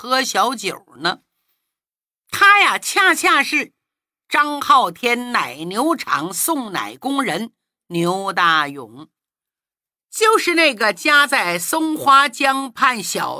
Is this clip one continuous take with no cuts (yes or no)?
yes